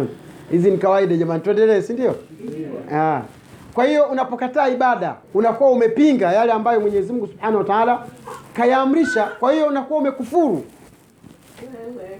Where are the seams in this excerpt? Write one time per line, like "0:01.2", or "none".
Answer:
0:05.2